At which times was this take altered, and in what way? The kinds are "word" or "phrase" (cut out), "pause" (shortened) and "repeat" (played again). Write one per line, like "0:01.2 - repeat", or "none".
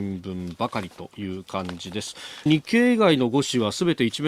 0:02.5 - phrase